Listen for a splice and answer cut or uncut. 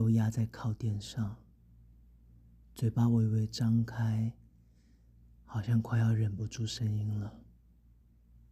uncut